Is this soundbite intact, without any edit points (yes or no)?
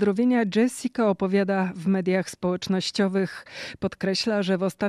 yes